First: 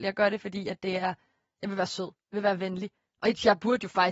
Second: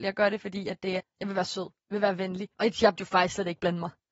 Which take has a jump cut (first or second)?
second